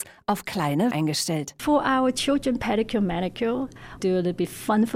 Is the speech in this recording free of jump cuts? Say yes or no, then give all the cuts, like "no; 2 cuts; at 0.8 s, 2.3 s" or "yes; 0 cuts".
no; 2 cuts; at 0.9 s, 4.0 s